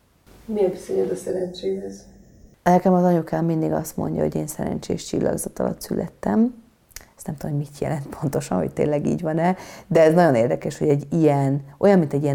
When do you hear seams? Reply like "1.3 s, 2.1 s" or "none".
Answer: none